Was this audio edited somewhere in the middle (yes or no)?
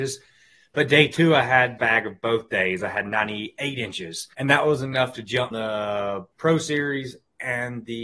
yes